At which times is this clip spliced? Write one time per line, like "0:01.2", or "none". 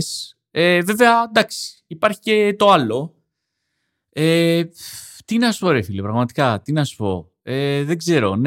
none